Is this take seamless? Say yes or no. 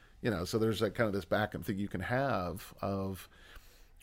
no